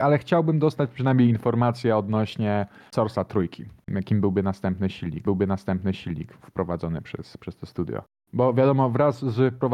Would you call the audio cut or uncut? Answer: cut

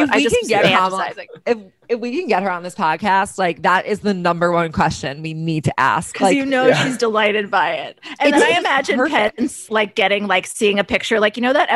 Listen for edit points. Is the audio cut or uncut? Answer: cut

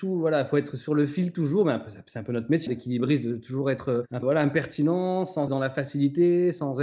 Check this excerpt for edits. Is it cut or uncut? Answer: cut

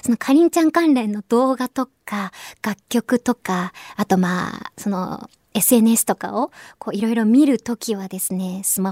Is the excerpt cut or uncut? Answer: uncut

